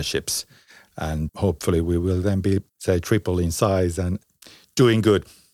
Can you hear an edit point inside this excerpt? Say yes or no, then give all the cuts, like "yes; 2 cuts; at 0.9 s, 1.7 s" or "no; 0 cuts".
yes; 2 cuts; at 1.3 s, 2.7 s